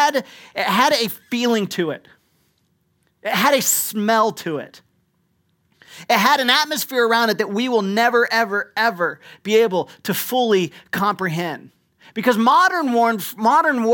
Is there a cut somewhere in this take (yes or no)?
no